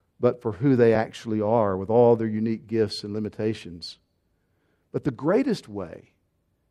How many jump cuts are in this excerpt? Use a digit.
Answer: 0